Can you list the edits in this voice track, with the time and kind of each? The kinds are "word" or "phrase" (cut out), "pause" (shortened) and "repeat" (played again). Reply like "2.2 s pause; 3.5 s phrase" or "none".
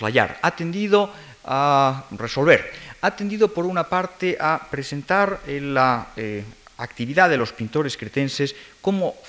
none